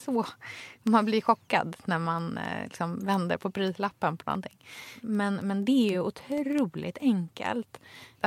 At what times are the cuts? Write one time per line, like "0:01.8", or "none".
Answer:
none